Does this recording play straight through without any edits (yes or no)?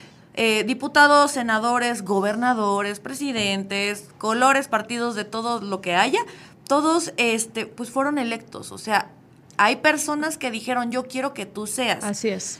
yes